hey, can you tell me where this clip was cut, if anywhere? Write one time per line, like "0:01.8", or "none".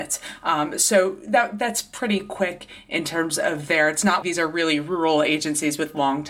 0:04.2

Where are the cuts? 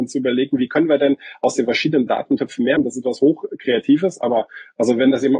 0:02.8

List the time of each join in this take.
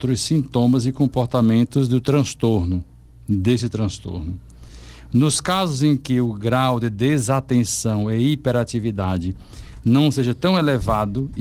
none

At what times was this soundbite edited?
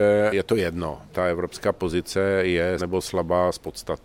0:01.1
0:02.8

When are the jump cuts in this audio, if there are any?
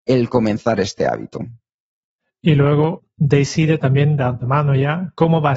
none

